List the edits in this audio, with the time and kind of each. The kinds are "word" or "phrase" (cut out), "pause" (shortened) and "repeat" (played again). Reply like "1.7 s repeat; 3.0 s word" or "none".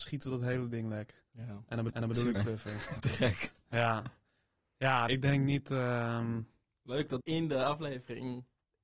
1.3 s pause; 1.9 s repeat; 2.3 s word; 5.1 s word; 7.2 s phrase